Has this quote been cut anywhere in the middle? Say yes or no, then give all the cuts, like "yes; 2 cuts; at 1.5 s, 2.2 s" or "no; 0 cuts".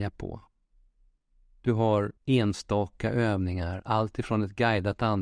yes; 1 cut; at 2.2 s